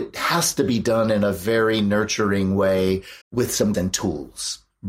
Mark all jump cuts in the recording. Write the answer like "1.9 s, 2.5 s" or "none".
3.2 s, 3.7 s